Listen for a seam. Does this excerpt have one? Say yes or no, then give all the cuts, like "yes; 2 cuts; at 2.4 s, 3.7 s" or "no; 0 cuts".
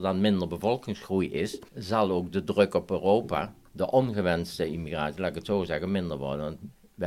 yes; 1 cut; at 1.7 s